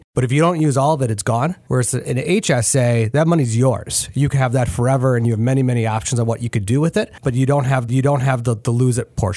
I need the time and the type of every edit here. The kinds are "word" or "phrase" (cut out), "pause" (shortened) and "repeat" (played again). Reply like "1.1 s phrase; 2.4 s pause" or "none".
7.9 s repeat